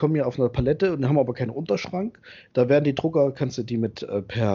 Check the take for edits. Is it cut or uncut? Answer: uncut